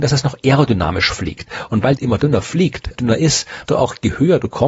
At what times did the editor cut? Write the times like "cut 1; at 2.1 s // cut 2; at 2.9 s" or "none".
cut 1; at 2.0 s // cut 2; at 2.9 s // cut 3; at 3.7 s